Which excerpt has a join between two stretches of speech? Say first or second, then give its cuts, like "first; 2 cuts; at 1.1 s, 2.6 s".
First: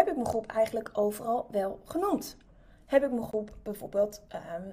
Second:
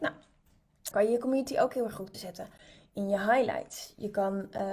second; 2 cuts; at 0.9 s, 2.1 s